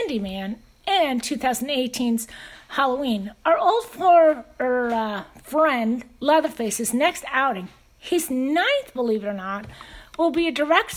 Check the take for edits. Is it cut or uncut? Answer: uncut